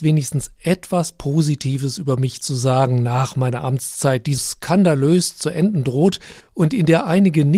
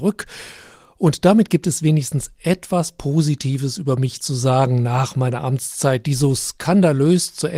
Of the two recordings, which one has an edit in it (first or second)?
first